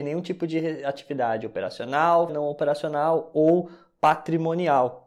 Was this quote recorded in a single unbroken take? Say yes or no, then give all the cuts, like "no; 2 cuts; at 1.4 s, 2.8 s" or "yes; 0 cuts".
no; 1 cut; at 2.3 s